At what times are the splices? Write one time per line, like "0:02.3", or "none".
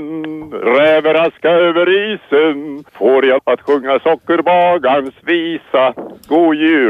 0:02.9
0:03.4